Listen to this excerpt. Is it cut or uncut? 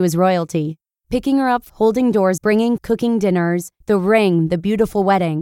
cut